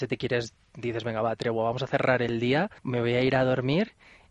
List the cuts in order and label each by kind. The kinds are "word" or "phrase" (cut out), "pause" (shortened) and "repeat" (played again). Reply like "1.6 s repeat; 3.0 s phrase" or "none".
2.8 s pause